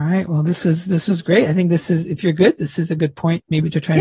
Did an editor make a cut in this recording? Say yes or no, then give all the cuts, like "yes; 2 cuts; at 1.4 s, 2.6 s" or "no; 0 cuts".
no; 0 cuts